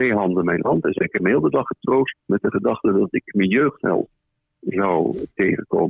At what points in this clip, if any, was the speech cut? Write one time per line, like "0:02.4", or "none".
0:02.2